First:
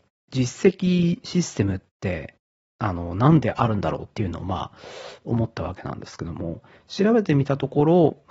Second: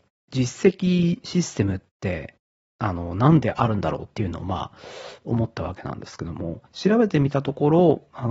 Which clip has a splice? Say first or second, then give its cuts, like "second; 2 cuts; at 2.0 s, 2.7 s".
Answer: second; 1 cut; at 6.7 s